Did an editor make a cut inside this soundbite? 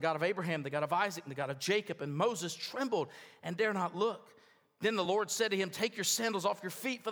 no; 0 cuts

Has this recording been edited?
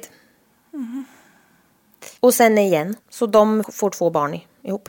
yes; 3 cuts; at 2.2 s, 3.0 s, 3.6 s

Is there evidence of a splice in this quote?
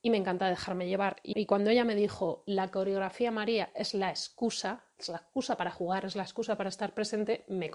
yes; 1 cut; at 1.3 s

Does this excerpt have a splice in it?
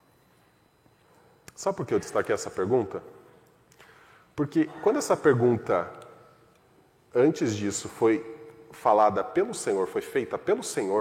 no; 0 cuts

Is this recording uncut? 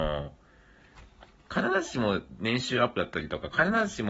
yes; 0 cuts

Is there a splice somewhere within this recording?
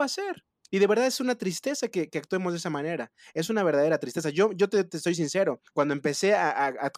yes; 1 cut; at 5.7 s

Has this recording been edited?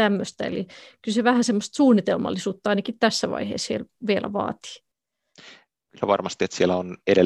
no; 0 cuts

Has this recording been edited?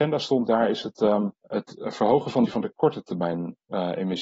yes; 2 cuts; at 1.3 s, 2.4 s

